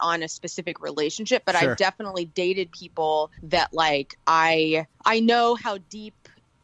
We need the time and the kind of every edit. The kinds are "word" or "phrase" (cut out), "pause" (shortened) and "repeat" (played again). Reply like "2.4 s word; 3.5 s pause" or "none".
3.3 s pause; 4.9 s pause